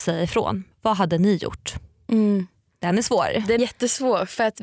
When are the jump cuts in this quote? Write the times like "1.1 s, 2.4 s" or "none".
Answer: 3.6 s